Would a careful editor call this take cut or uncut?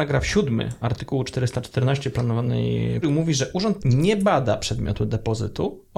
cut